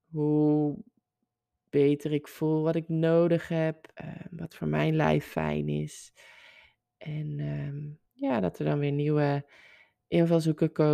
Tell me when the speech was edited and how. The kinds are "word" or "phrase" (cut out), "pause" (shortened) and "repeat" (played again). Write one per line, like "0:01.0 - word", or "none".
0:03.9 - pause
0:08.0 - pause